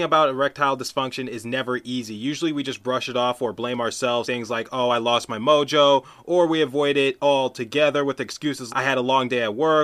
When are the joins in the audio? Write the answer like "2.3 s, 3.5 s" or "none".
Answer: 4.2 s, 8.7 s